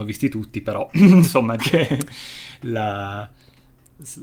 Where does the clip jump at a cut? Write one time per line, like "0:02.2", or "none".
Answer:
0:01.6